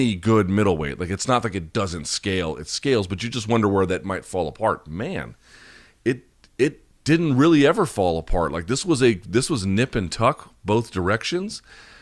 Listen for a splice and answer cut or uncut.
uncut